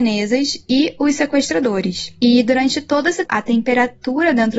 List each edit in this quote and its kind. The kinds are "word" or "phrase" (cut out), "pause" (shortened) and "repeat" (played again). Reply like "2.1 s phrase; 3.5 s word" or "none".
3.3 s word